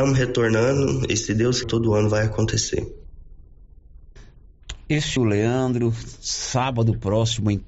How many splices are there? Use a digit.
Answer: 2